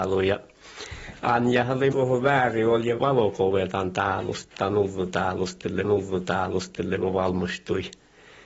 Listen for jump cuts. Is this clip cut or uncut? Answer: cut